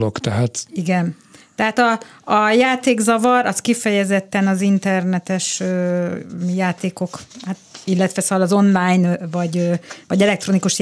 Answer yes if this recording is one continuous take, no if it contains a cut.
yes